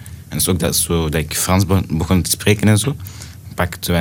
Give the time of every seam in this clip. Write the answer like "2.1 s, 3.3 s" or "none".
none

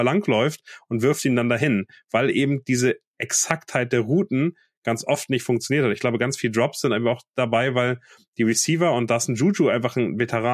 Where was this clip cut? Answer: none

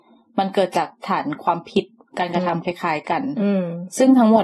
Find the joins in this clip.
none

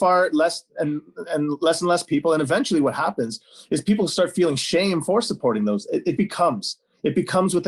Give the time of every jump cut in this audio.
6.2 s

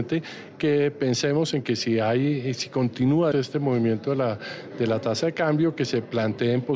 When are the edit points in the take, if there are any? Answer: 3.3 s

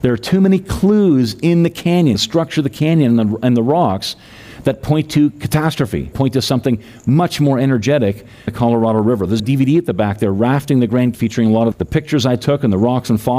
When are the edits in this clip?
2.1 s, 6.1 s, 8.5 s, 9.4 s, 11.1 s, 11.7 s

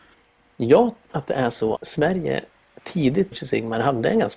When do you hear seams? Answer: 1.1 s, 1.8 s, 3.3 s

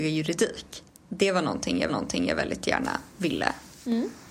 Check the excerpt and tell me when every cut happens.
1.9 s

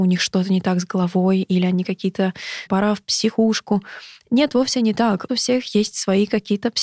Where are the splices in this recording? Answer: 2.7 s, 5.3 s

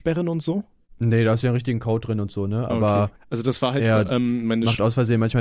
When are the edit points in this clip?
3.2 s

